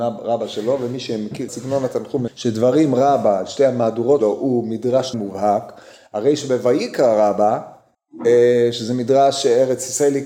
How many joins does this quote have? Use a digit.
4